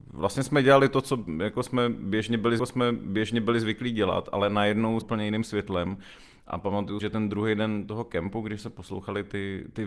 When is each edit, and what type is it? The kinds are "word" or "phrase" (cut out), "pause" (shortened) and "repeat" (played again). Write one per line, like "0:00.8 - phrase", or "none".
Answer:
0:02.6 - repeat
0:05.0 - phrase
0:07.0 - word